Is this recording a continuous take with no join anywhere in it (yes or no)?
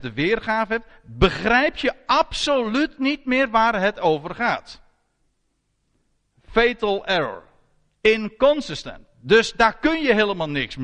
yes